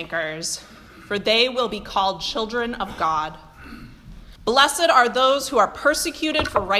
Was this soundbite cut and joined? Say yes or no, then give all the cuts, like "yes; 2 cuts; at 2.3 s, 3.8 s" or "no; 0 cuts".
yes; 1 cut; at 4.4 s